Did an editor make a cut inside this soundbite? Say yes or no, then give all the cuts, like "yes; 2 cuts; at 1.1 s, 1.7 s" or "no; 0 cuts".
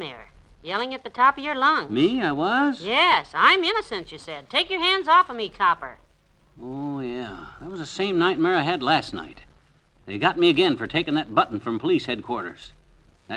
no; 0 cuts